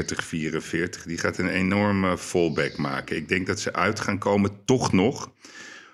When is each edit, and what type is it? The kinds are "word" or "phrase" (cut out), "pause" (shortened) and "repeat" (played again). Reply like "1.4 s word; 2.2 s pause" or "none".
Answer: none